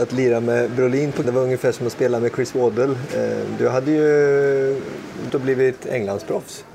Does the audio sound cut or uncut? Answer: cut